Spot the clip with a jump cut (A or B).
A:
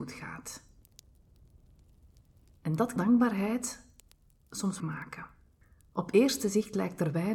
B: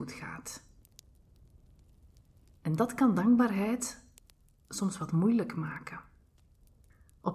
A